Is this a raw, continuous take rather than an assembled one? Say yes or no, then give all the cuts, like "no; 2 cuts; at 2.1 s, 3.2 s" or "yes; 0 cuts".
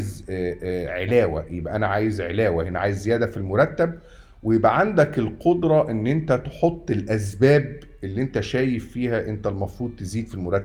yes; 0 cuts